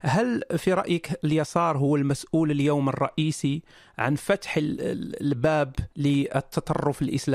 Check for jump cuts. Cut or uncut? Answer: cut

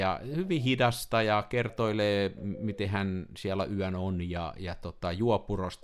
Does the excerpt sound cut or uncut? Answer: uncut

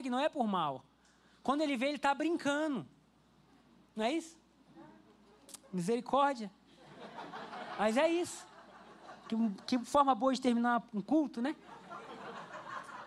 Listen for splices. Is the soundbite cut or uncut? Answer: uncut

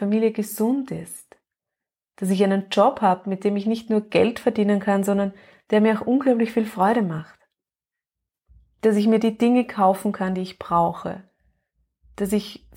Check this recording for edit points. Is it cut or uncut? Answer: uncut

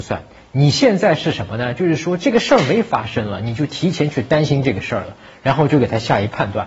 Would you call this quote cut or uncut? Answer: uncut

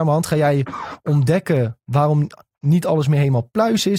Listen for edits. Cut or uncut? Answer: uncut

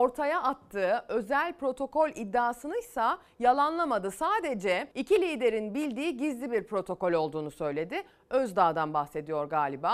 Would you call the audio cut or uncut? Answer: cut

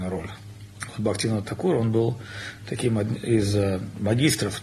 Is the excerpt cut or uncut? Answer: uncut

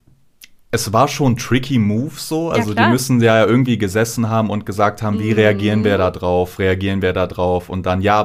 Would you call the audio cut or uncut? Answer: uncut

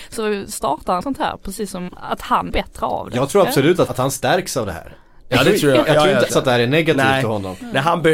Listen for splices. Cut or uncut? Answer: cut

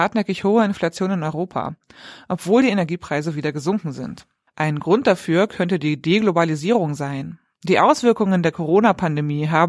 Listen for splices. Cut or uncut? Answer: uncut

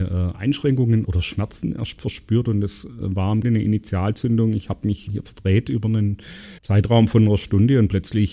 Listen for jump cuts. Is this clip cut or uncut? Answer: cut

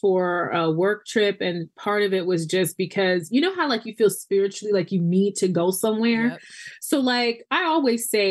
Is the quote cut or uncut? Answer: uncut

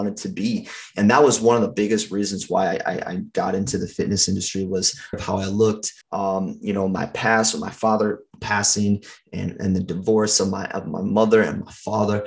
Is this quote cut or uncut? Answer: cut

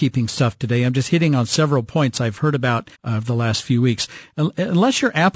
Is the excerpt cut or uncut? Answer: cut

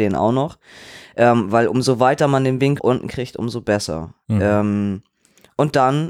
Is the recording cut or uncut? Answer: cut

